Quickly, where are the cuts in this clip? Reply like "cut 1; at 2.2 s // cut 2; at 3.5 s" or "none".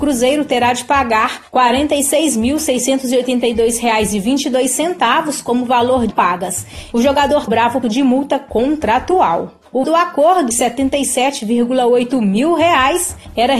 cut 1; at 6.1 s // cut 2; at 7.5 s // cut 3; at 7.8 s // cut 4; at 9.8 s // cut 5; at 10.5 s